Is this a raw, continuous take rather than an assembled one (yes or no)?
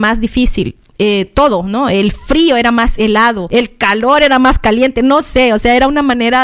yes